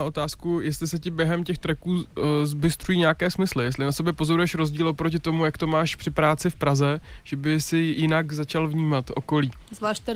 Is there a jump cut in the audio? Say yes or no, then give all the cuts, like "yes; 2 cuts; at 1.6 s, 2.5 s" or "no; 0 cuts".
no; 0 cuts